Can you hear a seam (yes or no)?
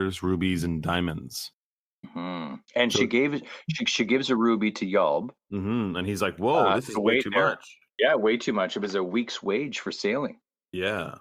no